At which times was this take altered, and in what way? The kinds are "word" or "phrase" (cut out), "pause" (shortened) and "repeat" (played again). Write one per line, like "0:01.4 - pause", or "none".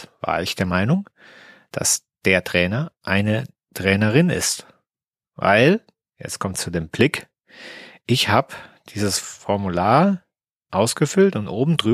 none